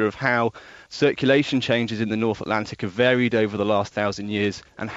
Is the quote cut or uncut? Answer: uncut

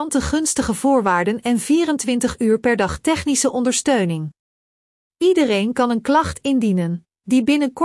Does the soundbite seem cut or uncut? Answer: uncut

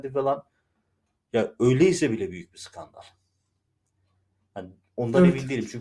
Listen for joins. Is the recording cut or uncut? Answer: uncut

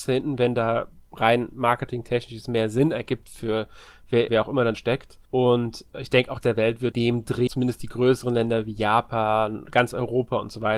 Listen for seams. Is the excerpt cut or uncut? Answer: cut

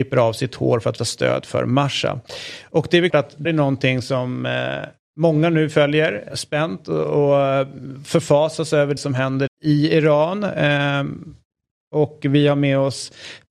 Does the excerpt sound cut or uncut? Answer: cut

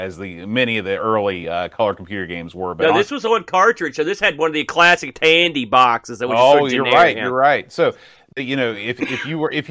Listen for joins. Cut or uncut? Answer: uncut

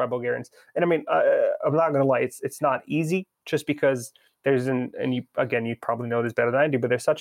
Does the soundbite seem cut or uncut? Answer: uncut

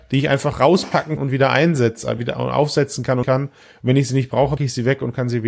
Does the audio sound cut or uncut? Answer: cut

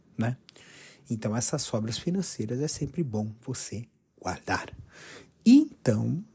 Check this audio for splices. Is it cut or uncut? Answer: uncut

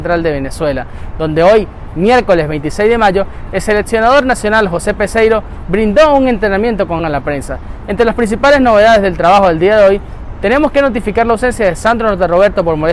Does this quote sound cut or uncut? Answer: cut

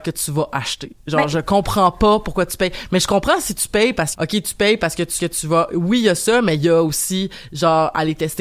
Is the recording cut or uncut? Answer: cut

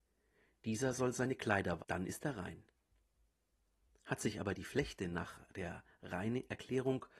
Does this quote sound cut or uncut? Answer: cut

